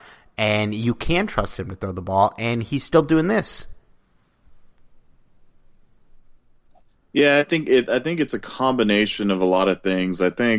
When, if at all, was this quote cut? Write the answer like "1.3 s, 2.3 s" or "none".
none